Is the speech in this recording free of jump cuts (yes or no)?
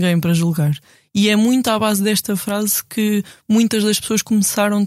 yes